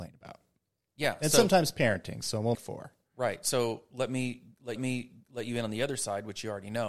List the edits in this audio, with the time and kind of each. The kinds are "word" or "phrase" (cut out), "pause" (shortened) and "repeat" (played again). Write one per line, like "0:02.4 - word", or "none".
0:02.5 - word
0:04.8 - repeat